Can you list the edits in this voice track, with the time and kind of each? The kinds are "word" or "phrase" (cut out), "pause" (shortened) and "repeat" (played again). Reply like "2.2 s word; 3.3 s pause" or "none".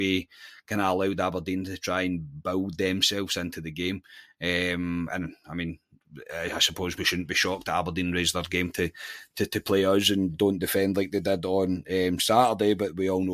none